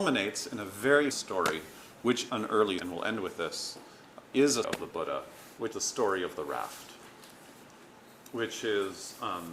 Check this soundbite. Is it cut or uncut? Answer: cut